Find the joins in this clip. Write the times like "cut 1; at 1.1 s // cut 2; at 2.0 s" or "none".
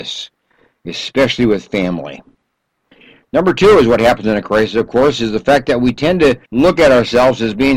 cut 1; at 6.4 s